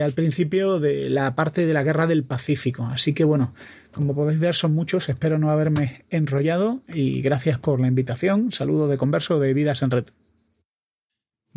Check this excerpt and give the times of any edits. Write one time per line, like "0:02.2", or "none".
none